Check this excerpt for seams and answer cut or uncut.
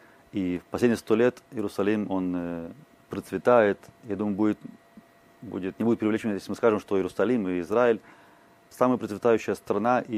cut